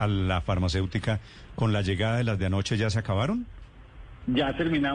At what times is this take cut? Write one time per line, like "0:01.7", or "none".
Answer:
none